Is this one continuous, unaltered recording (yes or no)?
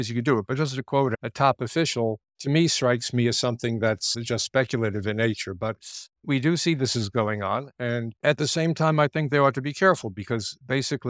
no